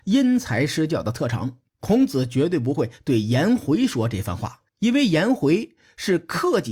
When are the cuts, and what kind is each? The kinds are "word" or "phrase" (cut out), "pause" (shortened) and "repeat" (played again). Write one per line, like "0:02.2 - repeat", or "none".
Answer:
0:01.7 - pause
0:04.7 - pause

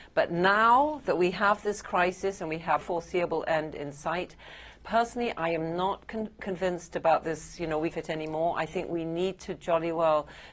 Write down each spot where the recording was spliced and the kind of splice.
0:02.8 - word
0:07.9 - word

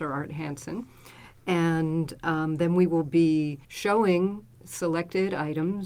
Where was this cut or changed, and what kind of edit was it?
0:03.6 - pause

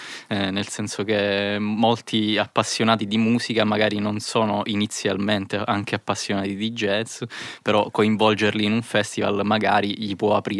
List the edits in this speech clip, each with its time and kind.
none

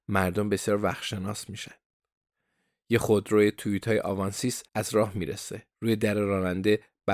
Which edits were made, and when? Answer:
0:04.7 - pause
0:05.7 - pause

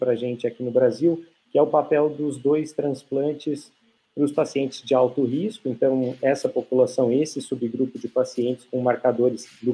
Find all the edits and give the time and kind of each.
none

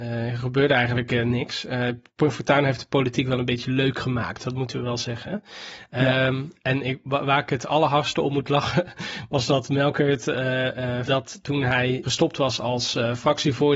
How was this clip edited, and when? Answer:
0:11.1 - word
0:12.0 - word

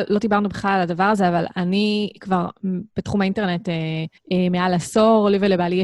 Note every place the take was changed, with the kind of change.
0:04.2 - pause

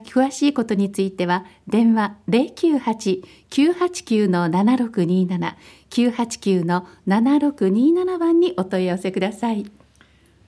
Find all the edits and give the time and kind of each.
none

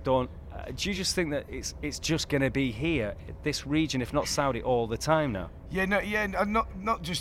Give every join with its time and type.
none

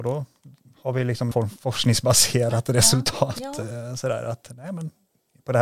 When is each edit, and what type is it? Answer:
0:01.3 - word

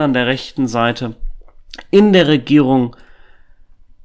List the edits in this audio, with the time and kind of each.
none

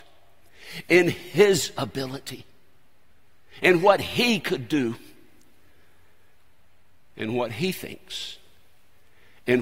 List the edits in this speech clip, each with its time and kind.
none

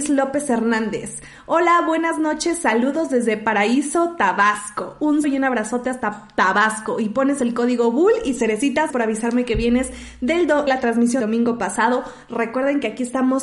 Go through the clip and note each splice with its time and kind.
0:05.2 - word
0:08.9 - word
0:10.7 - word
0:11.2 - word

